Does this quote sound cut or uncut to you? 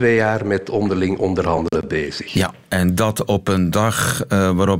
uncut